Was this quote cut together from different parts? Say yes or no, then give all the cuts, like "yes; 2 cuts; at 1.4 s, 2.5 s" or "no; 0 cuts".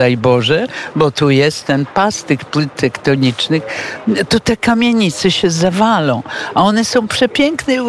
no; 0 cuts